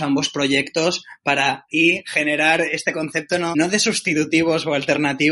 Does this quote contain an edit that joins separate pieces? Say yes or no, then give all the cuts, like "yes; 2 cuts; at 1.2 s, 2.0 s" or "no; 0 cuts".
yes; 2 cuts; at 1.7 s, 3.5 s